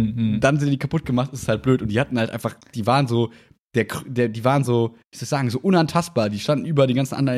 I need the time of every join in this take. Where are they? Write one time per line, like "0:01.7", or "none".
none